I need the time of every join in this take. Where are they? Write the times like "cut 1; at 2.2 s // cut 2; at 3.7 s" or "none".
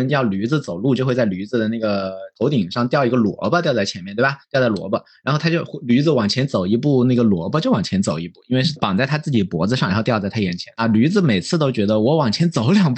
cut 1; at 4.4 s